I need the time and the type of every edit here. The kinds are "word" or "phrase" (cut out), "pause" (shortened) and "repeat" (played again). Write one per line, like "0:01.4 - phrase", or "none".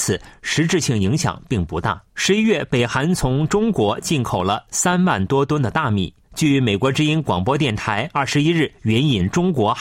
0:02.1 - pause